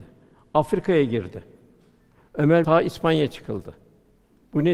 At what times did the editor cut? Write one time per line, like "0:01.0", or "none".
0:02.6

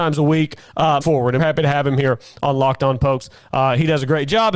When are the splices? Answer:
0:01.0
0:01.4

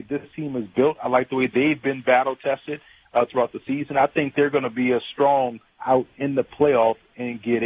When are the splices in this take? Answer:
0:05.8

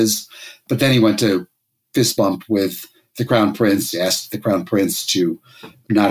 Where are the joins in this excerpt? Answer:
none

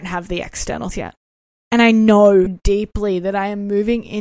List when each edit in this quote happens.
0:00.9
0:01.5
0:02.5

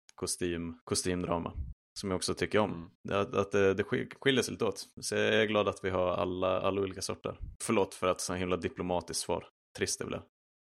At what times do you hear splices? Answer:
none

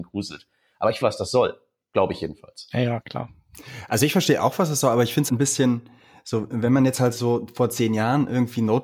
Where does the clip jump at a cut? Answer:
0:01.0
0:05.3

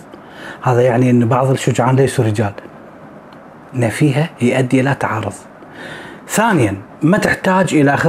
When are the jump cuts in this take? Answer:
none

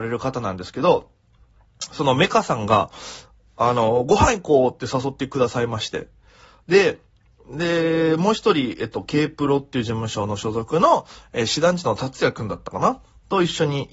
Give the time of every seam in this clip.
none

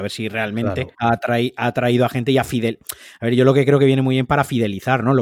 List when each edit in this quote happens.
0:00.9

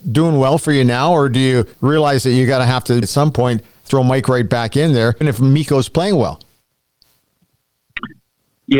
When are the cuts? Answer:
0:01.7
0:03.0
0:05.2

